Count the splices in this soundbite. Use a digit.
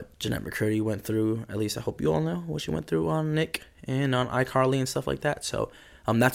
0